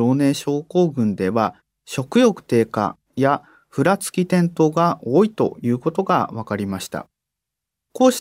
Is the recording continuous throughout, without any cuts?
yes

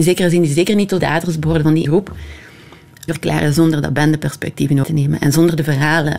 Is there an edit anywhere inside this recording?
yes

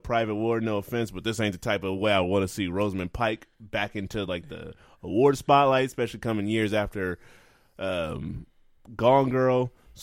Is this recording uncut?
yes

